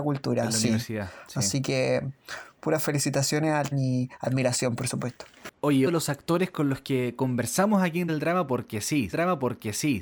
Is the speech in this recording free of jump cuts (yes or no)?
no